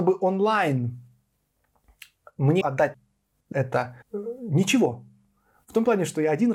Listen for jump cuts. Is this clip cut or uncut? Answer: cut